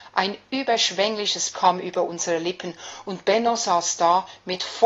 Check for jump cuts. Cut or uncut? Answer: cut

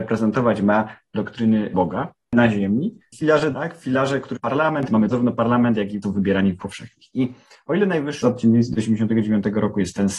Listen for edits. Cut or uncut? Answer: cut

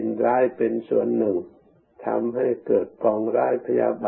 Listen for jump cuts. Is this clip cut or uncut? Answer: uncut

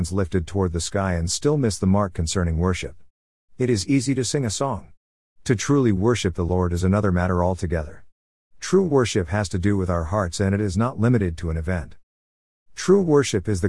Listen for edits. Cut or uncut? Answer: uncut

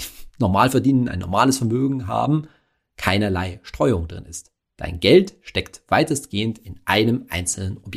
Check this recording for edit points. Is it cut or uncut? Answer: uncut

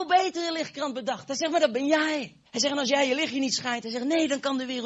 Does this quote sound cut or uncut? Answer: cut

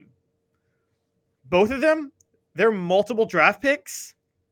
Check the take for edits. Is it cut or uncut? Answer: uncut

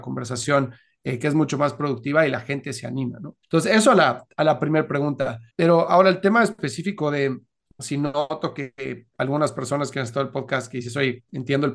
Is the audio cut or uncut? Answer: cut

